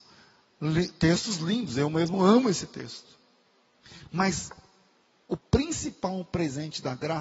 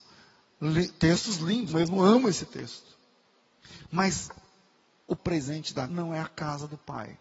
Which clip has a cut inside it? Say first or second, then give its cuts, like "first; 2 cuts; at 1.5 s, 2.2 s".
second; 3 cuts; at 1.7 s, 5.2 s, 5.9 s